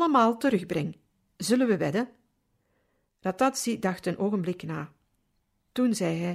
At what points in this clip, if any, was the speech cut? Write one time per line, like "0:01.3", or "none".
none